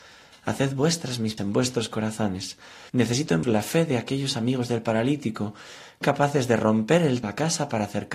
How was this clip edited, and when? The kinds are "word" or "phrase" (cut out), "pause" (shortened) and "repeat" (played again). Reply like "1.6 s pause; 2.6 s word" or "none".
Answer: 1.4 s word; 2.9 s pause; 3.4 s word; 6.0 s word; 7.2 s phrase